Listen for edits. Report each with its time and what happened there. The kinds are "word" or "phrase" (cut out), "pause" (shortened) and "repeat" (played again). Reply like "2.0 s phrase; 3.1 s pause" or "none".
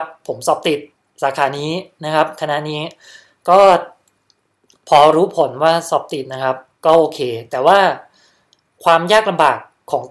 0.9 s pause; 6.7 s pause